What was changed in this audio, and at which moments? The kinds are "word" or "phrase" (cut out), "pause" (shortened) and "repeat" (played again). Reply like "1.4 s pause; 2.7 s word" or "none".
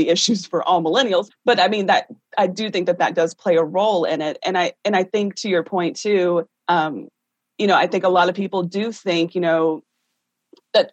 1.3 s word; 6.6 s pause

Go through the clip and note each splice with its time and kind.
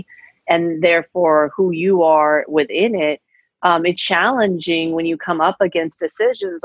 4.0 s word

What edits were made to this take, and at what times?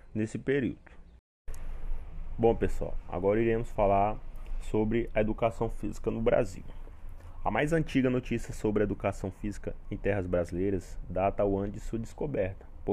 none

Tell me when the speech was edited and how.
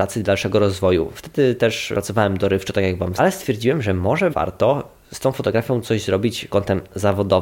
1.9 s word; 3.2 s word; 4.3 s word; 6.5 s word

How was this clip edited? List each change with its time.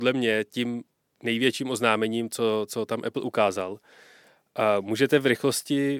none

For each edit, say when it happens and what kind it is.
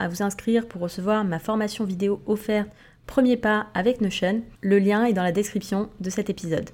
4.5 s pause

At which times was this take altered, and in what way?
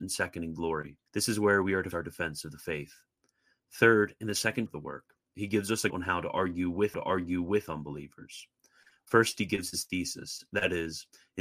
1.1 s pause; 1.9 s word; 4.7 s word; 5.9 s word; 6.9 s repeat

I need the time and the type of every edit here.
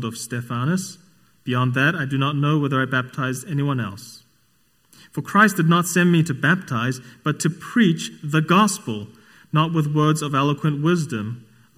none

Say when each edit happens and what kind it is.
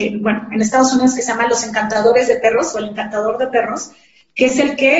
none

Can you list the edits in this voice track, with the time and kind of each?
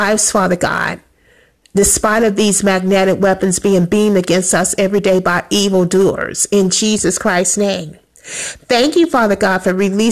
none

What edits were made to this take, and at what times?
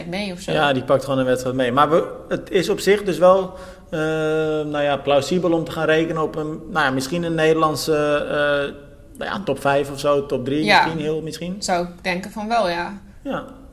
none

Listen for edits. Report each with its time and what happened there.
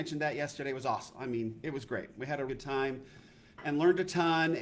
2.5 s word

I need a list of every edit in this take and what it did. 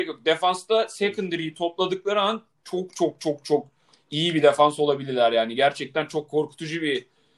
none

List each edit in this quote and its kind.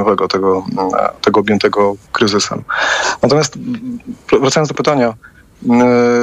2.1 s word; 4.7 s word

